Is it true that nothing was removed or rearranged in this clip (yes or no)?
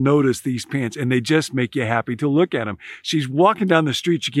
yes